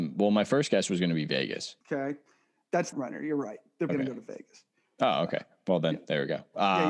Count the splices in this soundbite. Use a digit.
3